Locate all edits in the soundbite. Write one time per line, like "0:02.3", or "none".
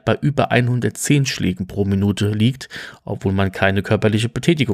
none